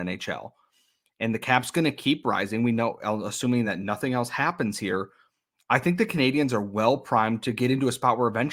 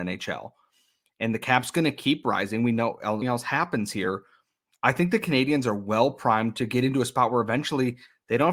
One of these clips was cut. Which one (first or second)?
second